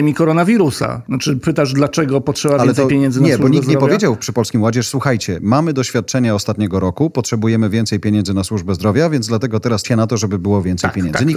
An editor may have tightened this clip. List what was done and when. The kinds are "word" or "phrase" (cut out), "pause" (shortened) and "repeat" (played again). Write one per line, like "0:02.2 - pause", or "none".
0:09.8 - phrase